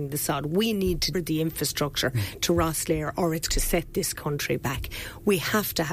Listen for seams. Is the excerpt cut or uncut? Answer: cut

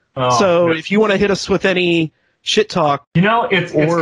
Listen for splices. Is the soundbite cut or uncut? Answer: uncut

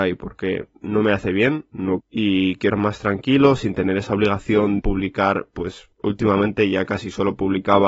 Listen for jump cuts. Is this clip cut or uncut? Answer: cut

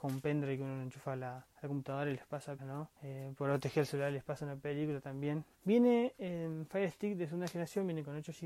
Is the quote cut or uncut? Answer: cut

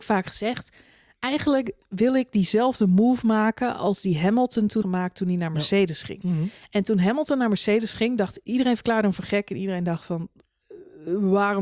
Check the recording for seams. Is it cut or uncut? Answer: cut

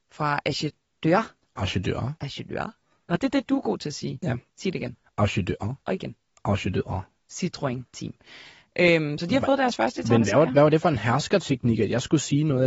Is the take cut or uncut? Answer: cut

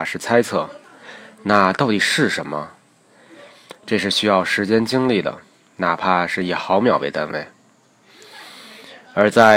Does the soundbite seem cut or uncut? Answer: uncut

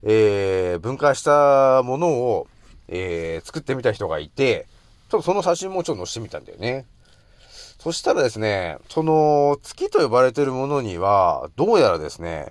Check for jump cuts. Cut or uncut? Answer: cut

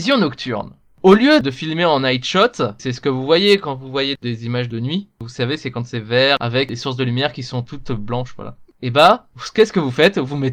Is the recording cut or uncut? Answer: uncut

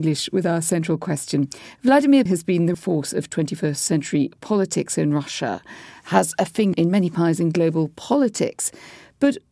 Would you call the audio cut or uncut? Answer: cut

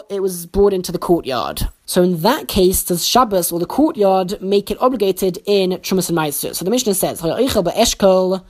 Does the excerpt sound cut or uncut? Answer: uncut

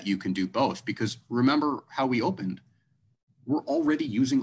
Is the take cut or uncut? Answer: uncut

